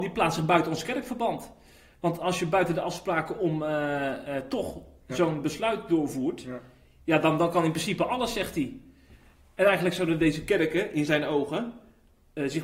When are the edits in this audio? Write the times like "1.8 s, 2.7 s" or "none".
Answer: none